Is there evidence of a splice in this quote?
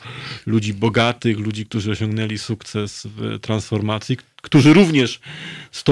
no; 0 cuts

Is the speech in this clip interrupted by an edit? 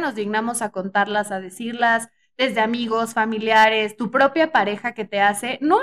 no; 0 cuts

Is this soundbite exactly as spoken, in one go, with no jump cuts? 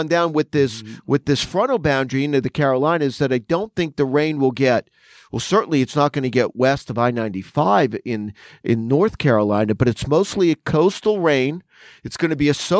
yes; 0 cuts

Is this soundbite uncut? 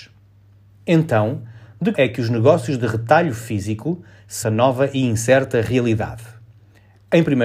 no; 2 cuts; at 1.9 s, 4.4 s

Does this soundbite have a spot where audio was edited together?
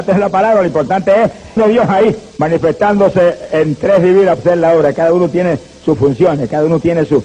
yes; 3 cuts; at 1.6 s, 2.3 s, 4.4 s

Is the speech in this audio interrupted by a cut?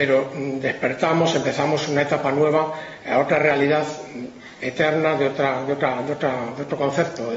no; 0 cuts

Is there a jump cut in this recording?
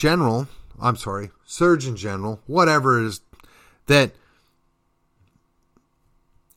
no; 0 cuts

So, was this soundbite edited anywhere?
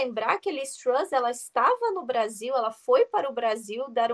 no; 0 cuts

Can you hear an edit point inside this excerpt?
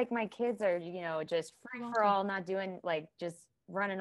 no; 0 cuts

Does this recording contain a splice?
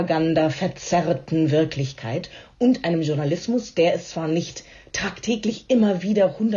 no; 0 cuts

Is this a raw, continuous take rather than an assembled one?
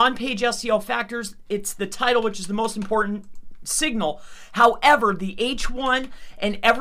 yes; 0 cuts

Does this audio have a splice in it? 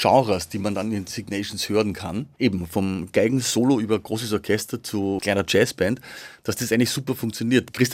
no; 0 cuts

